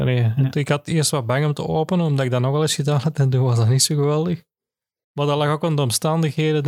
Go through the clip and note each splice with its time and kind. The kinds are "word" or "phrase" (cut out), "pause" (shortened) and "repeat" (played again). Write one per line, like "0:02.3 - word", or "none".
none